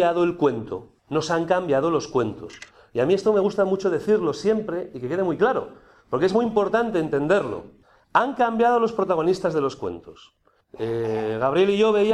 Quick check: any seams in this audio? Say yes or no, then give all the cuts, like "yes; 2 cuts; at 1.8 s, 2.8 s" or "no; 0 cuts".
no; 0 cuts